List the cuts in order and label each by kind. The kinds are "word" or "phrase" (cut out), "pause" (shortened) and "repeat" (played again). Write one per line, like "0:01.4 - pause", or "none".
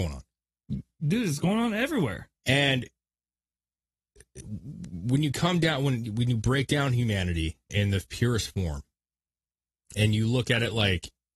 0:07.7 - word